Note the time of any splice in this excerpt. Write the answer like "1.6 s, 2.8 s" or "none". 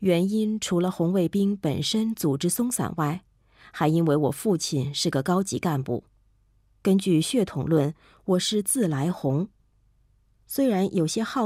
none